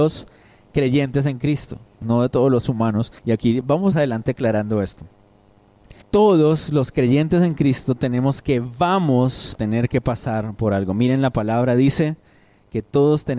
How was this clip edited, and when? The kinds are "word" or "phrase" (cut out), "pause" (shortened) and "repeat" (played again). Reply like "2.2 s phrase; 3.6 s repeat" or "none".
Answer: 2.0 s phrase; 2.6 s word; 3.2 s pause; 3.6 s word; 3.9 s phrase; 6.0 s pause; 8.4 s phrase; 9.6 s word